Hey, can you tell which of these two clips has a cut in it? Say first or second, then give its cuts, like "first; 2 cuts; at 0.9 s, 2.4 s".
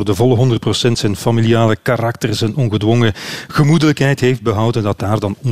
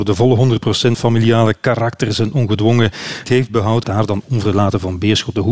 second; 3 cuts; at 0.9 s, 3.2 s, 3.8 s